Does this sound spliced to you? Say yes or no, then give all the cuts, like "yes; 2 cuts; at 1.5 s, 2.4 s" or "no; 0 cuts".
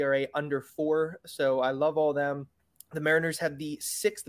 no; 0 cuts